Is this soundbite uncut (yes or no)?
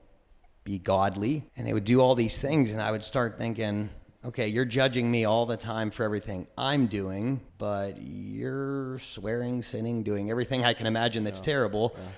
no